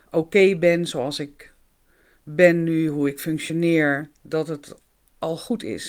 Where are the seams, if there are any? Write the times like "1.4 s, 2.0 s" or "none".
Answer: none